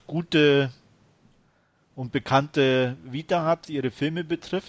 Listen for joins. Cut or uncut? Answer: cut